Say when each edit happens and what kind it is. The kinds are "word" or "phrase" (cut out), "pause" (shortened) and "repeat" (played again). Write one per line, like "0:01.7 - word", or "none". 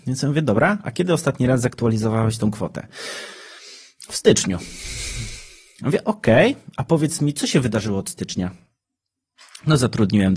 none